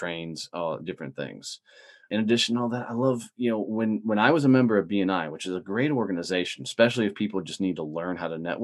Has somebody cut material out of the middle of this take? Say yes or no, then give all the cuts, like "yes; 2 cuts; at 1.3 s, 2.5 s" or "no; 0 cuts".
no; 0 cuts